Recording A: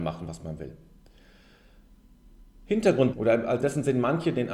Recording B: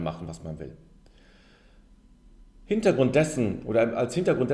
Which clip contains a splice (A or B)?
A